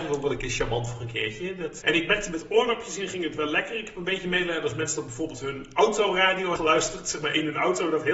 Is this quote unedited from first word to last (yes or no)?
no